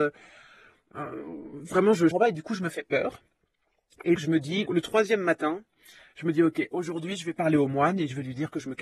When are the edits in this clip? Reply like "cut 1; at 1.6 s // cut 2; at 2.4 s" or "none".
cut 1; at 2.1 s // cut 2; at 4.2 s // cut 3; at 4.7 s